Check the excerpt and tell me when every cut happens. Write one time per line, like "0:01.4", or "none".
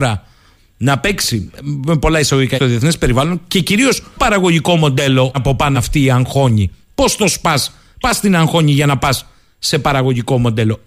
0:02.6
0:04.2
0:05.3
0:05.7
0:08.0